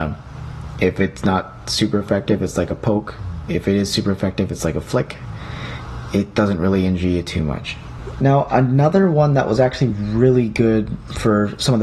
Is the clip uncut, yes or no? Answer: yes